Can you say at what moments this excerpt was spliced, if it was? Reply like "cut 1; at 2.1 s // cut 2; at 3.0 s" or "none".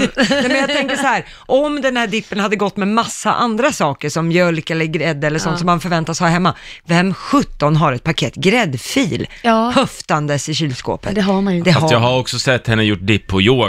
none